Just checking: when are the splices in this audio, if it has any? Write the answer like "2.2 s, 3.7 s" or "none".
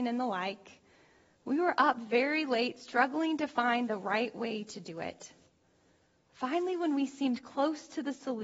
none